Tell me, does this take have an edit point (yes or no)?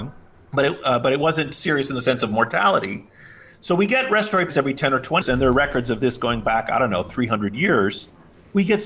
yes